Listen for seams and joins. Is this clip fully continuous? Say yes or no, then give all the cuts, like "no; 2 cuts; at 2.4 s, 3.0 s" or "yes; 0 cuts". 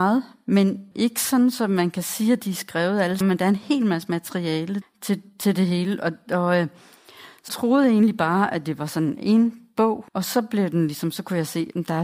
no; 5 cuts; at 0.9 s, 3.2 s, 4.8 s, 7.5 s, 10.1 s